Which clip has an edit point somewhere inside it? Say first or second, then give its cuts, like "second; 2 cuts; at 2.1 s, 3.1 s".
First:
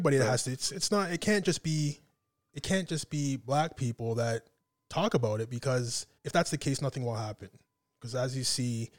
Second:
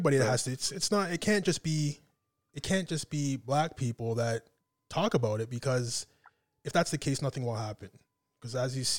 first; 1 cut; at 6.2 s